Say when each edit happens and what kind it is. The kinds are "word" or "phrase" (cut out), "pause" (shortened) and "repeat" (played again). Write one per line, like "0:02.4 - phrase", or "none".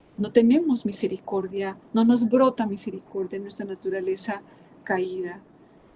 0:01.8 - pause